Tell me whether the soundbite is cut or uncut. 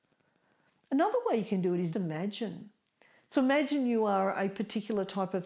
cut